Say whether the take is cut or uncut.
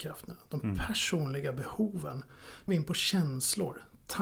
cut